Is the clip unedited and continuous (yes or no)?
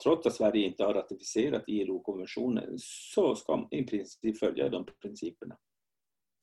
yes